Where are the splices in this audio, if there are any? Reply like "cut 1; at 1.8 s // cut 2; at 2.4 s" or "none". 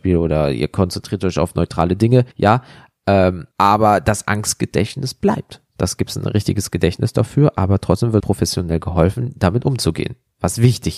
cut 1; at 2.3 s // cut 2; at 3.5 s // cut 3; at 8.2 s